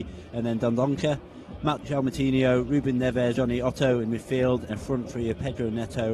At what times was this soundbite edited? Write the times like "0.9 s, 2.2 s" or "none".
1.8 s, 3.3 s, 4.7 s